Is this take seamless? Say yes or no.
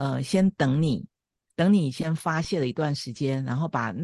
yes